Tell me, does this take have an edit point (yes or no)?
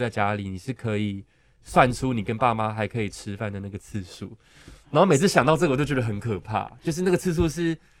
no